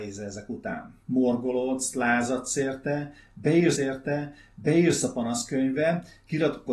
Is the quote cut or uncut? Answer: cut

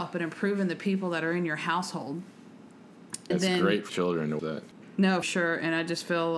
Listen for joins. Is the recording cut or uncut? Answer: cut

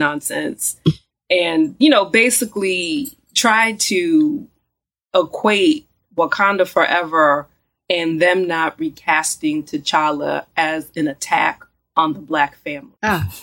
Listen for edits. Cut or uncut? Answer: uncut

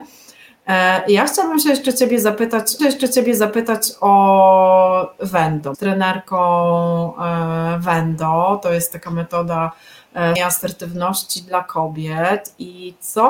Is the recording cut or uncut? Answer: cut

